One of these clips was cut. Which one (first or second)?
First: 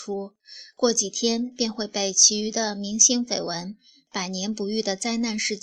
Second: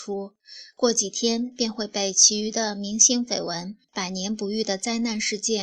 second